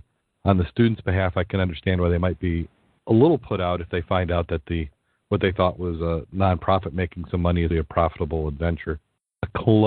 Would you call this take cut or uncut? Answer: cut